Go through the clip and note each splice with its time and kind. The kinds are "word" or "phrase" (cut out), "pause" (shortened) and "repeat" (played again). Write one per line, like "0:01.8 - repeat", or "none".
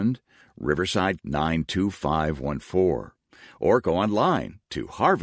0:01.2 - word